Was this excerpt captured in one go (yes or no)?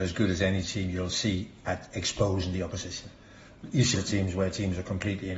no